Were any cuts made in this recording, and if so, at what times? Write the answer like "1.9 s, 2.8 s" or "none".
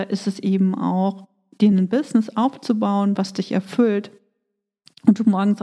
none